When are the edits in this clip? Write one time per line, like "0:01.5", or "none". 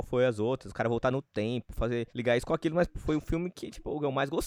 0:02.1
0:02.9